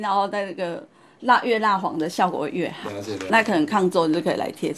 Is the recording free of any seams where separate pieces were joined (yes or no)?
no